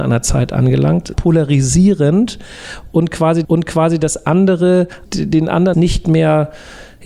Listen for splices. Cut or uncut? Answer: cut